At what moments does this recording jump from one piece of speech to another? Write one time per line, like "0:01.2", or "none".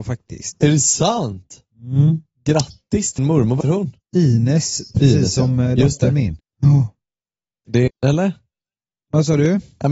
0:03.2
0:03.6
0:04.0
0:06.4
0:07.9